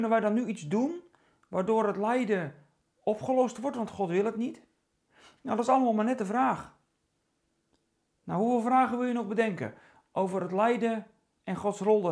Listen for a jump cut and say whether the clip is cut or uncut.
uncut